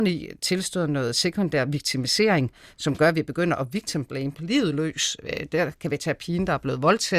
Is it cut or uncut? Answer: uncut